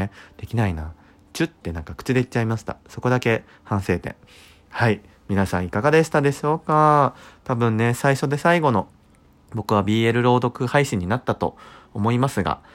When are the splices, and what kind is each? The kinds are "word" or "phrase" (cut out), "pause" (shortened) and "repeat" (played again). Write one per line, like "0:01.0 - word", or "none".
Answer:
none